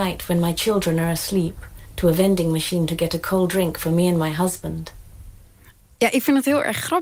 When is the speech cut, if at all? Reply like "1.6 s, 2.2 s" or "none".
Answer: none